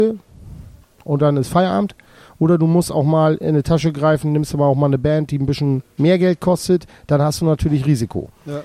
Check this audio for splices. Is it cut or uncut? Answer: uncut